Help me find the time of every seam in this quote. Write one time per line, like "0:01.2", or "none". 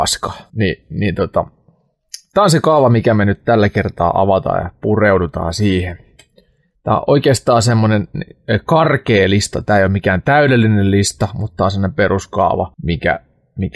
none